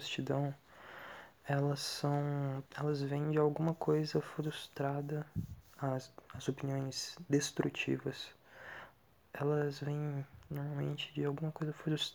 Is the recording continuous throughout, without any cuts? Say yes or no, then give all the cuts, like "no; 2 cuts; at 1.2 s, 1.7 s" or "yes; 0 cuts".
no; 1 cut; at 2.7 s